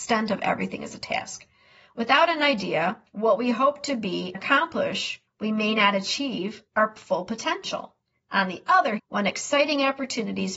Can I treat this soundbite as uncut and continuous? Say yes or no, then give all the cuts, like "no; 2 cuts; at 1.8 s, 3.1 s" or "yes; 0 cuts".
no; 5 cuts; at 3.1 s, 4.3 s, 5.3 s, 6.7 s, 9.0 s